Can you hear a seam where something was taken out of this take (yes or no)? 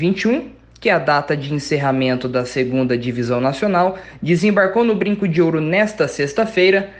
no